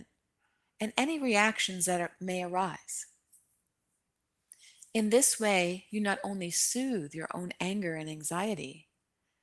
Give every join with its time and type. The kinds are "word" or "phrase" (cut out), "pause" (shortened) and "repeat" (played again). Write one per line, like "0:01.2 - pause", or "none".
none